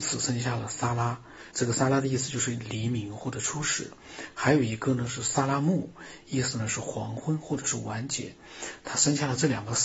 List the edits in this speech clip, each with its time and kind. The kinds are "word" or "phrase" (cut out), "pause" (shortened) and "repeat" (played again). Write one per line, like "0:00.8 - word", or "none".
0:01.5 - pause